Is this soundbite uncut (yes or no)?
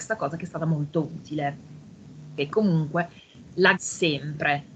no